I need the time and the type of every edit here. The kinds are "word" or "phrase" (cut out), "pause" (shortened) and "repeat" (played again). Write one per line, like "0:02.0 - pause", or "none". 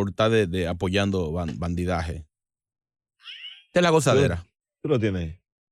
0:04.6 - pause